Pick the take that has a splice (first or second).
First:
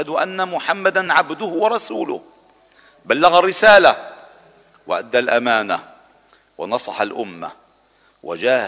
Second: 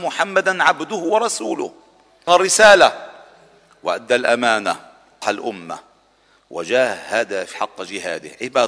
second